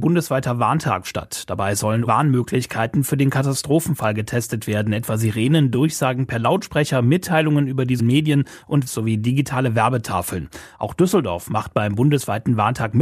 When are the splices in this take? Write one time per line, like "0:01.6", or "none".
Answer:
0:02.1
0:08.0
0:08.9